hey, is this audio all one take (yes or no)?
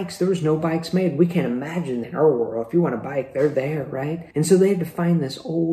no